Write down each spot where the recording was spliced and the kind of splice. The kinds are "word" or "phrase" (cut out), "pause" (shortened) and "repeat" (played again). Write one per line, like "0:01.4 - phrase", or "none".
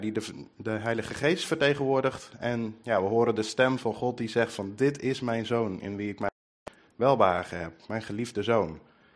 none